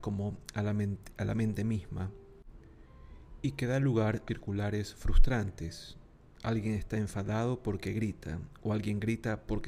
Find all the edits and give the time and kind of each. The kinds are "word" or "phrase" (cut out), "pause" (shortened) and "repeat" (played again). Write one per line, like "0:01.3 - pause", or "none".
0:04.3 - word